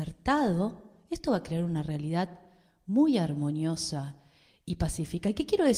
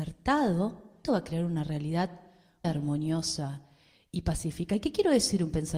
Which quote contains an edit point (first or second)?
second